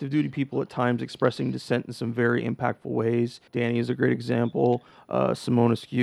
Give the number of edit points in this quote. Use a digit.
1